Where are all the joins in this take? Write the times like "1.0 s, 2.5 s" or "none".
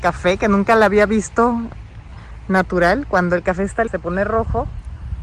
3.9 s